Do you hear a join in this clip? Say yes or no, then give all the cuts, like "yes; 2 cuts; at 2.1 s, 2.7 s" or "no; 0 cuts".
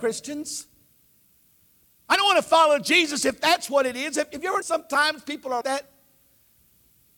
yes; 2 cuts; at 4.6 s, 5.6 s